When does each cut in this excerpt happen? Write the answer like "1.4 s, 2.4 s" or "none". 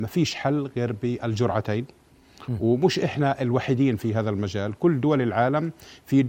none